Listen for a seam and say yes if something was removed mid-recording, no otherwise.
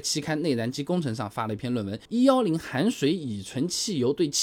yes